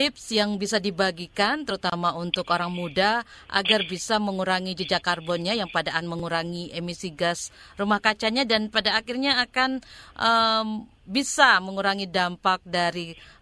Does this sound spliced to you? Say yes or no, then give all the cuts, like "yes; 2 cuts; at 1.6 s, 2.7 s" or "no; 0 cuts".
yes; 1 cut; at 6.0 s